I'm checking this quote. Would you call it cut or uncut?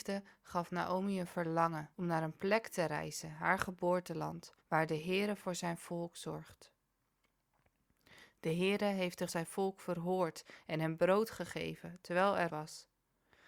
cut